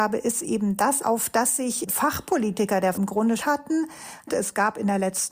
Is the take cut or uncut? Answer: cut